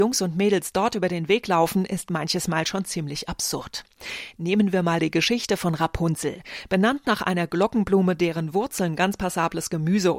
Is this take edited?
no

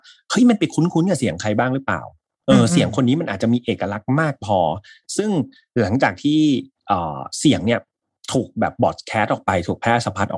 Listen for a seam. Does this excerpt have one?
no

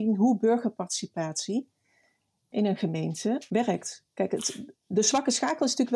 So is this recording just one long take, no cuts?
yes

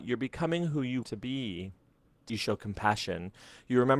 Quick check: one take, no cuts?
no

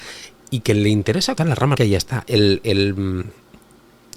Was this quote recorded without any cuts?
no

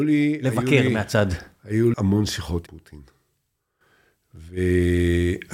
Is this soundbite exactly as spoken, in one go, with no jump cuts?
no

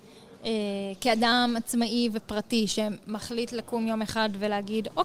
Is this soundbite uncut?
yes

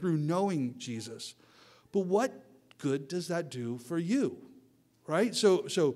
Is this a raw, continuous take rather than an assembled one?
yes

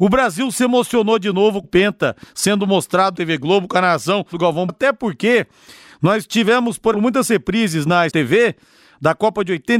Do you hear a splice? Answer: yes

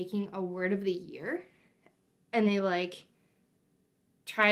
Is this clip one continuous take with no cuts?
no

